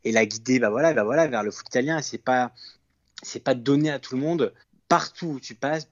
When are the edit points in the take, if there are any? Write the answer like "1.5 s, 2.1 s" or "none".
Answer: 0.9 s, 4.6 s